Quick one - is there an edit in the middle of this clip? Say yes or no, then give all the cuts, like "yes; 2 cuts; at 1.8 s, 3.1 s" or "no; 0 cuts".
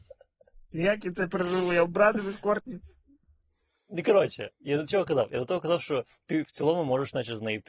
no; 0 cuts